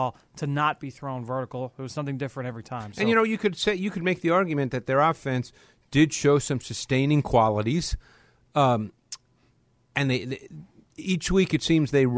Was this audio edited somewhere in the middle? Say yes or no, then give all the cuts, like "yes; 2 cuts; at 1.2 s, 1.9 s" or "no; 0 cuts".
no; 0 cuts